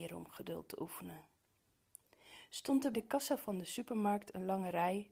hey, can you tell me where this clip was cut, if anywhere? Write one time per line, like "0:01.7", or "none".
0:02.9